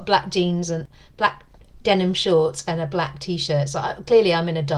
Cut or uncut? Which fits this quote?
uncut